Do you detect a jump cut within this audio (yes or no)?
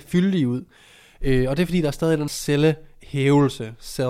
yes